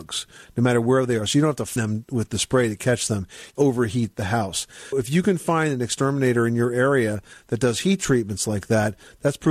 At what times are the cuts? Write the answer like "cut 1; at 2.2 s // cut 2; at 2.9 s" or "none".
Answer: cut 1; at 1.8 s // cut 2; at 3.5 s // cut 3; at 4.9 s

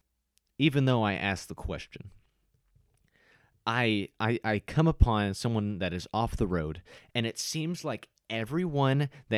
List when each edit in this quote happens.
none

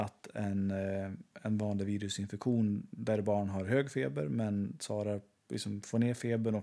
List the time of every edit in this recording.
none

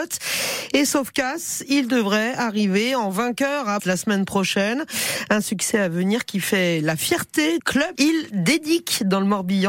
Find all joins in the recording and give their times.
cut 1; at 3.8 s // cut 2; at 7.6 s // cut 3; at 8.0 s

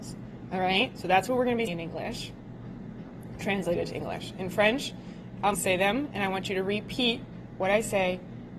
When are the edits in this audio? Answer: cut 1; at 1.7 s // cut 2; at 5.5 s

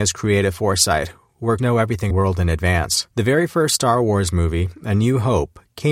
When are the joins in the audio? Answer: cut 1; at 1.6 s // cut 2; at 2.1 s // cut 3; at 3.1 s

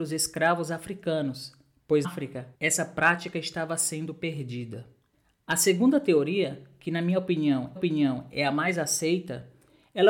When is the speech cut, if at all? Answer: cut 1; at 2.0 s // cut 2; at 2.5 s // cut 3; at 7.8 s

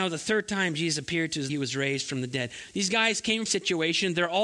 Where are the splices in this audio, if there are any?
cut 1; at 1.5 s // cut 2; at 3.5 s

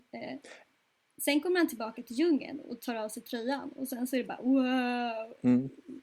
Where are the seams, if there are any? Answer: none

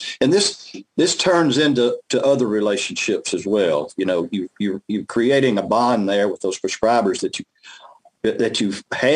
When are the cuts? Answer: none

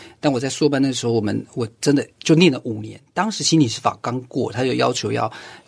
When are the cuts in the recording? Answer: cut 1; at 2.1 s

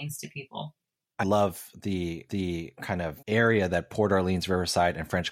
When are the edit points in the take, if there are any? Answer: cut 1; at 1.2 s // cut 2; at 2.3 s // cut 3; at 3.2 s

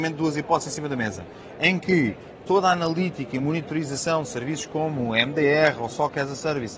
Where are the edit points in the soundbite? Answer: none

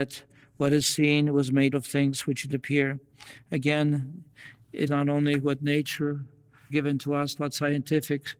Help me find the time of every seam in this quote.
cut 1; at 1.7 s // cut 2; at 2.5 s // cut 3; at 4.9 s // cut 4; at 6.7 s // cut 5; at 7.4 s

